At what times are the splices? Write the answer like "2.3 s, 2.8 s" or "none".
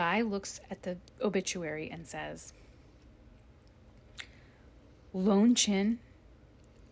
1.1 s